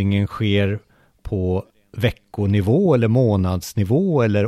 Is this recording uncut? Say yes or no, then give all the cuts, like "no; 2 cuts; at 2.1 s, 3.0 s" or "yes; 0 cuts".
yes; 0 cuts